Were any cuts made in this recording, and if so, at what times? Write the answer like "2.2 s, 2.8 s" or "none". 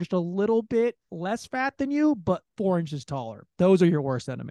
1.0 s